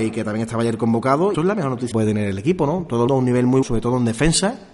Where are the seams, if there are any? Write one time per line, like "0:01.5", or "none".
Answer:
0:01.3
0:01.9
0:03.1
0:03.6